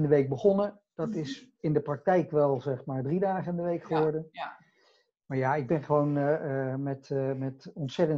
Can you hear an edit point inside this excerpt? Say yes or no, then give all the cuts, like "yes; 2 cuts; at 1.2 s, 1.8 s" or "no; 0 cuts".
no; 0 cuts